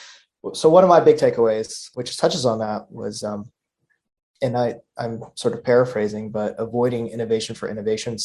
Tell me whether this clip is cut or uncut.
uncut